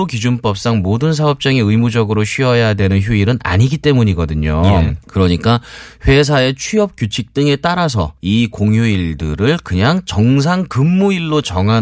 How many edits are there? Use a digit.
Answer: 2